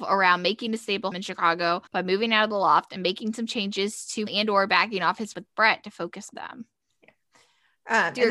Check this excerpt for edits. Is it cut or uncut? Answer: cut